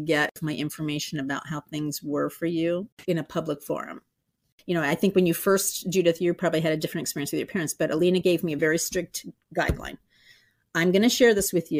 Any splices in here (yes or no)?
no